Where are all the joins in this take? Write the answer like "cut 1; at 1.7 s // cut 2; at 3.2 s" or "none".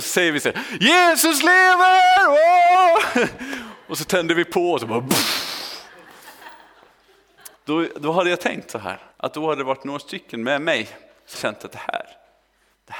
cut 1; at 7.6 s // cut 2; at 9.1 s // cut 3; at 11.3 s